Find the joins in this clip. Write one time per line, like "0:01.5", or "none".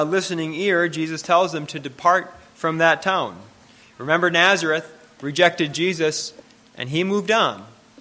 none